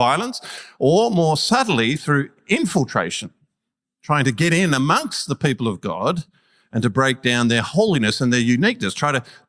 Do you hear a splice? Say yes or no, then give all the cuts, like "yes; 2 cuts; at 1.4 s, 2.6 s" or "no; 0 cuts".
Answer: no; 0 cuts